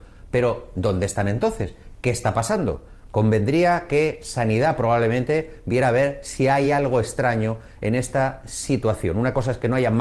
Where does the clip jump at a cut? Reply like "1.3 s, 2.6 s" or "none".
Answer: none